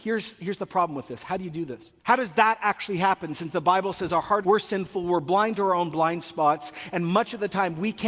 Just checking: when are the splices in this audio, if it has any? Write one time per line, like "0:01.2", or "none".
0:02.0
0:04.4